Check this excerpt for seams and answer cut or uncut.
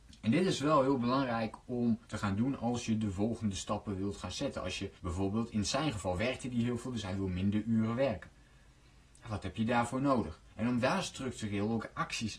cut